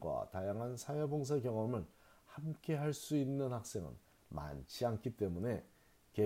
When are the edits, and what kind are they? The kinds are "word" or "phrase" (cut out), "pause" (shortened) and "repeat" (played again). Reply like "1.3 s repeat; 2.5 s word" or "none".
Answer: none